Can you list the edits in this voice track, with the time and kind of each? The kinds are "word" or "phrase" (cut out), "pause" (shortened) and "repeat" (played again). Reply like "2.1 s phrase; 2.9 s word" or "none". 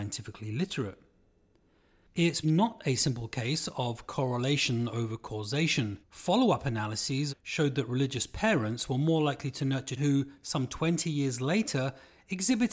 2.4 s word; 6.0 s pause; 7.3 s phrase; 10.0 s word